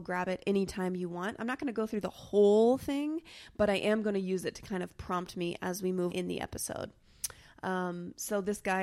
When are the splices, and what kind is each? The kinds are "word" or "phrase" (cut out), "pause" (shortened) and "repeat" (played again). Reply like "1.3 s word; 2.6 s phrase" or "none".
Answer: 6.1 s word